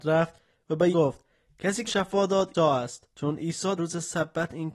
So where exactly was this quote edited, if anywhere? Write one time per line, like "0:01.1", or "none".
0:00.9
0:01.9
0:02.5
0:03.1
0:03.8